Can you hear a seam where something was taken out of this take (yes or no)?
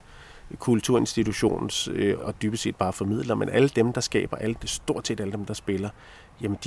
yes